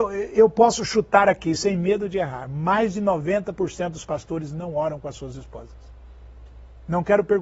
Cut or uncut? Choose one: uncut